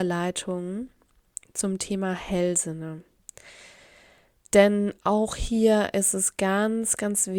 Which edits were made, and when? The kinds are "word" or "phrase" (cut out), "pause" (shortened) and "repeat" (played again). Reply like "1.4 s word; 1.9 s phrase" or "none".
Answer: none